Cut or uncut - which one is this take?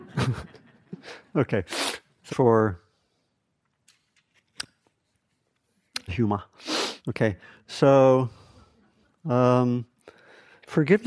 cut